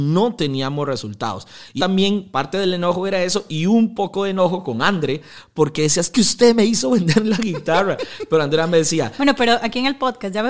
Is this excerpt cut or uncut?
cut